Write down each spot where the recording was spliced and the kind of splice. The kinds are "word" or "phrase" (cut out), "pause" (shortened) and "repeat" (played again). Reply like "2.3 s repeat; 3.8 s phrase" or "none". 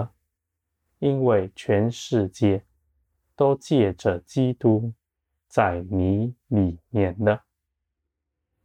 none